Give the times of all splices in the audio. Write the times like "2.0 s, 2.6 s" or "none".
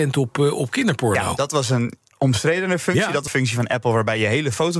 2.1 s, 3.3 s